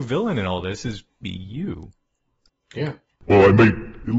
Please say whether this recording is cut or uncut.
cut